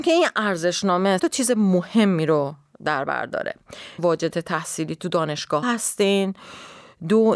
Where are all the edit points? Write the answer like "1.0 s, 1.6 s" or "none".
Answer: 1.2 s, 4.0 s, 4.3 s, 5.6 s